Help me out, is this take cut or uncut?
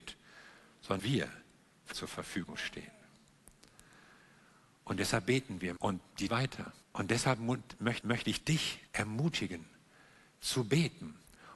cut